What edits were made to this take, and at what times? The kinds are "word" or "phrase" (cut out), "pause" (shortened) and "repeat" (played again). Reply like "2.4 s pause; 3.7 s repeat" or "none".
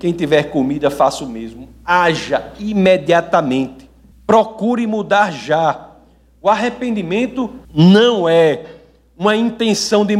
4.1 s pause; 7.6 s pause